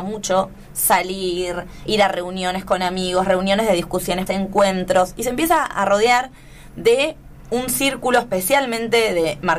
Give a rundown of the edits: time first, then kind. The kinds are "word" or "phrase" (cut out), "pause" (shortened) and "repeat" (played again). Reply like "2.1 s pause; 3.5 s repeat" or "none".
1.9 s word; 4.3 s word; 5.7 s word

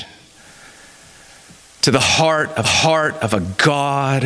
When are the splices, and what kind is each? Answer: 2.6 s repeat

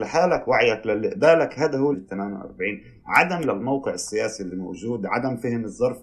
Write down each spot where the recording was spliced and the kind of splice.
1.9 s word; 3.4 s word

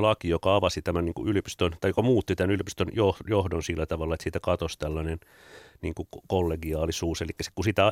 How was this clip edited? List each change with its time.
none

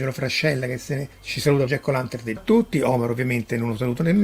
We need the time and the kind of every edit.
1.1 s pause; 1.7 s phrase; 2.4 s phrase

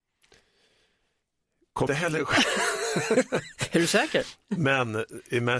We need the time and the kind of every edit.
1.9 s word

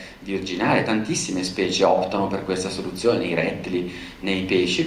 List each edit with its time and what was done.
none

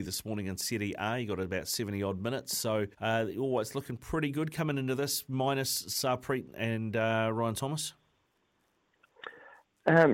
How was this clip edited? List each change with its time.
2.9 s pause

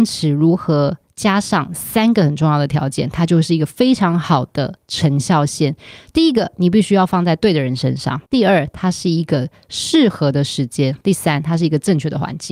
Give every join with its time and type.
8.3 s pause; 11.0 s pause

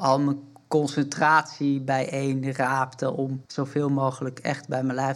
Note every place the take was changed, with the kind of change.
3.4 s pause

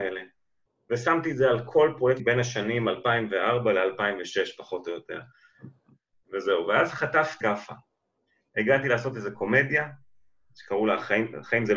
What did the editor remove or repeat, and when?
2.2 s word; 7.4 s word

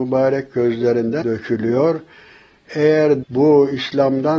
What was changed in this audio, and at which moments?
1.2 s word; 3.2 s word

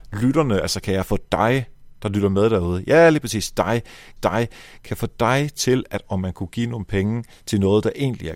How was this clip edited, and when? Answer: 4.2 s repeat; 6.0 s word

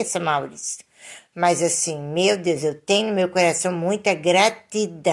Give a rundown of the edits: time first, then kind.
none

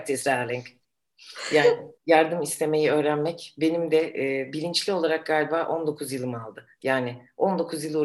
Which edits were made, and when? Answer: 2.0 s pause

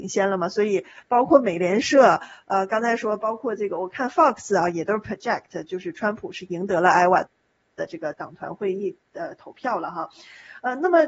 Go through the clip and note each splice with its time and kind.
none

